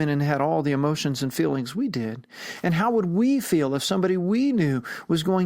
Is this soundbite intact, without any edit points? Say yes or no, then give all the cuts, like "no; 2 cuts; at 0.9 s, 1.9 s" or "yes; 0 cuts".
yes; 0 cuts